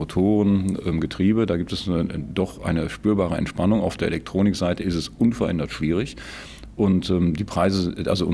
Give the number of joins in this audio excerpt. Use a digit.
0